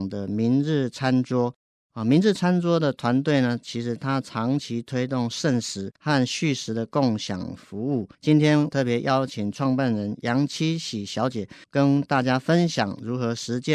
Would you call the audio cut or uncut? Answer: cut